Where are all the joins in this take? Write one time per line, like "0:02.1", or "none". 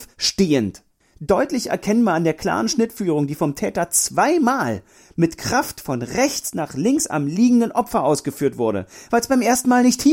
none